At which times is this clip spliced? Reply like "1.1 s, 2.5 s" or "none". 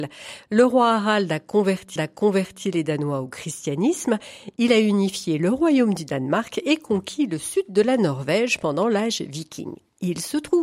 2.0 s